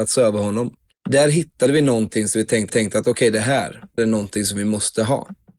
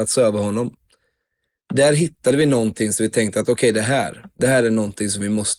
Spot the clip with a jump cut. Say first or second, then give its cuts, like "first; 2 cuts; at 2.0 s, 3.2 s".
first; 3 cuts; at 0.9 s, 2.7 s, 4.0 s